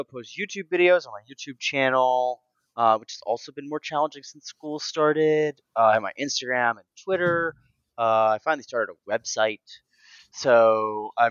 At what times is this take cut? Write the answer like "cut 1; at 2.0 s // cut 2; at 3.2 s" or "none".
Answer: none